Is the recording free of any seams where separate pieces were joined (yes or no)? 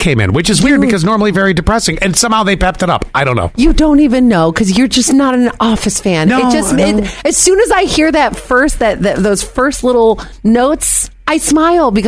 yes